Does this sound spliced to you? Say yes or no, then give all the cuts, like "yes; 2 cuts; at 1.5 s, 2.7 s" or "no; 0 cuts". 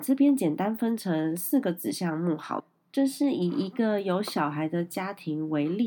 no; 0 cuts